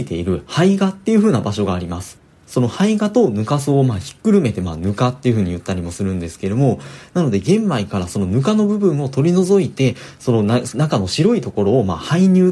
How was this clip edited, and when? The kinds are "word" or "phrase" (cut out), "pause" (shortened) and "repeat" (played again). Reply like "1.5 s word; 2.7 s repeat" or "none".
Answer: 2.4 s pause